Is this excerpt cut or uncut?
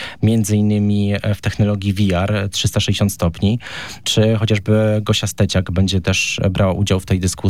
uncut